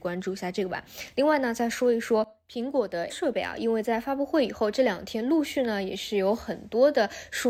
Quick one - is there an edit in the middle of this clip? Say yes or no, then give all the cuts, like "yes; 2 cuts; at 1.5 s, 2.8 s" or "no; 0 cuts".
yes; 1 cut; at 3.1 s